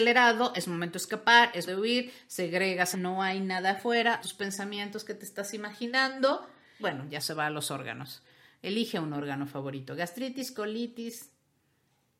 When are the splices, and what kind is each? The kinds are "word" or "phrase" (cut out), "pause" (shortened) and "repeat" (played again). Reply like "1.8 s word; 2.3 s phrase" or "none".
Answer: 1.7 s word; 2.9 s word; 4.2 s word; 6.8 s word; 7.2 s word